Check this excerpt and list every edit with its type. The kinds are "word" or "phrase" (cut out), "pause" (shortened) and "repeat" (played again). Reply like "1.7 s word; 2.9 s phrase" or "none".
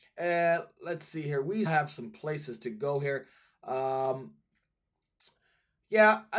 1.7 s word